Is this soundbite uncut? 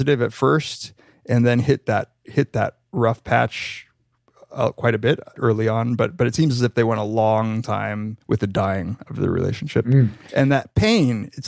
no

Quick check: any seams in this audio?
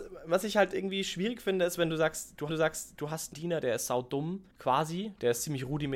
yes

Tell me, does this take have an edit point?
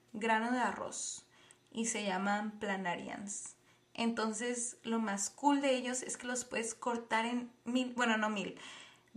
no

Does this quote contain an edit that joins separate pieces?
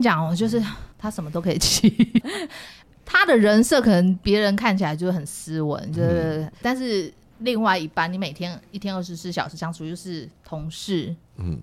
yes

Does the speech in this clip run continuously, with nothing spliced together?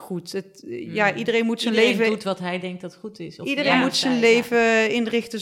yes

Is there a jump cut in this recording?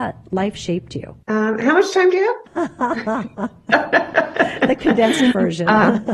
yes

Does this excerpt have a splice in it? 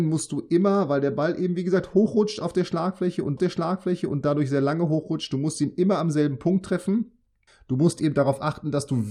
yes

